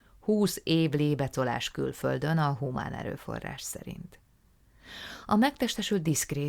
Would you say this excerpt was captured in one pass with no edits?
yes; 0 cuts

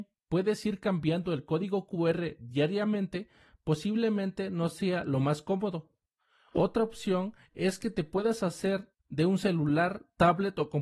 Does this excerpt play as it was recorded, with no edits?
no; 1 cut; at 9.0 s

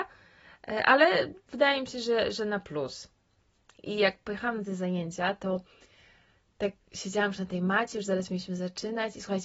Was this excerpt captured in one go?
yes; 0 cuts

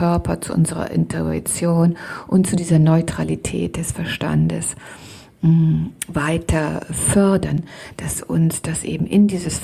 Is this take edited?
no; 0 cuts

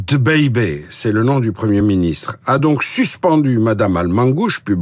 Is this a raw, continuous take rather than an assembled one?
yes; 0 cuts

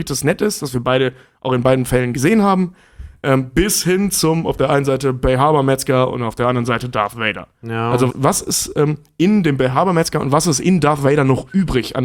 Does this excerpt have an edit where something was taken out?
yes; 1 cut; at 8.1 s

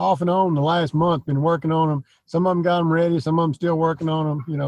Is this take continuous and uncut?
yes; 0 cuts

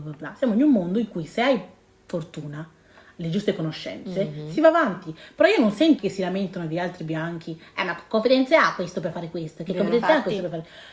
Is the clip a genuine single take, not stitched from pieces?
no; 1 cut; at 6.0 s

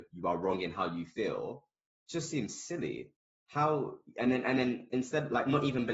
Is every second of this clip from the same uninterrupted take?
yes; 0 cuts

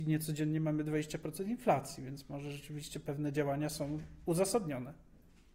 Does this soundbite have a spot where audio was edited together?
no; 0 cuts

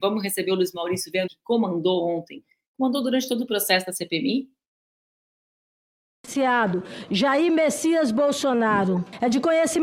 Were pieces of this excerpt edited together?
yes; 1 cut; at 1.3 s

